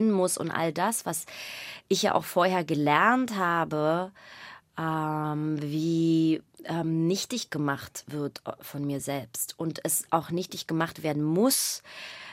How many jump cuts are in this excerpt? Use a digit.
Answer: 0